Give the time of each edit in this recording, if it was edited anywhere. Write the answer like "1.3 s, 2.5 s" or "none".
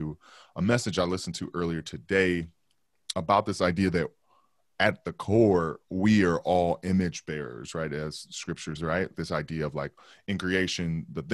3.1 s, 8.8 s, 9.1 s